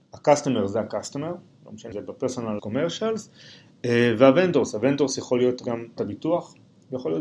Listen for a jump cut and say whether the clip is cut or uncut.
cut